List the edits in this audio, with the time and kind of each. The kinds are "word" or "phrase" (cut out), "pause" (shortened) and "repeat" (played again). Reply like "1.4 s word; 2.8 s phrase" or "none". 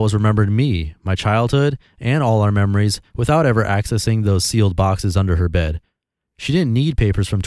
none